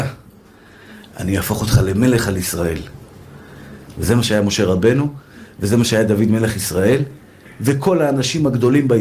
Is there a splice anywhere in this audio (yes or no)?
no